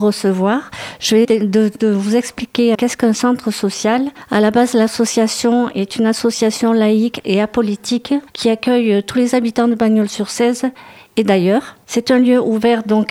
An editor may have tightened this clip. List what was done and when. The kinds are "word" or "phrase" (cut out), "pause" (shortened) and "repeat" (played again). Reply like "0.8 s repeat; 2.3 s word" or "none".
1.2 s word; 2.7 s word

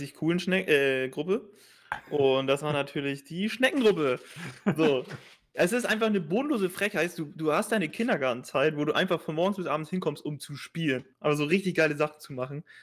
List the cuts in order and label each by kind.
11.1 s pause

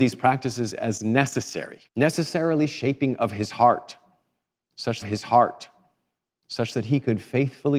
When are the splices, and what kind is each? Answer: 1.9 s pause; 5.0 s repeat

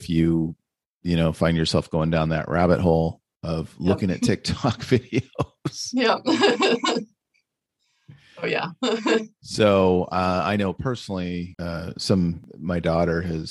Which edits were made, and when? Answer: none

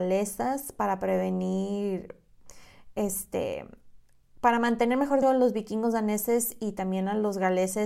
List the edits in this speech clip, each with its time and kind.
5.2 s word

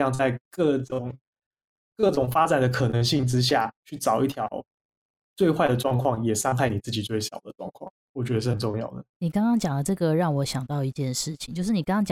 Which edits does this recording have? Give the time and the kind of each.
3.8 s pause; 8.0 s pause; 9.1 s pause

